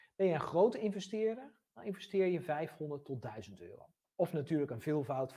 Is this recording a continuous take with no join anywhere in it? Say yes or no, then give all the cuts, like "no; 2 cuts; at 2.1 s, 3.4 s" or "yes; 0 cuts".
no; 1 cut; at 4.0 s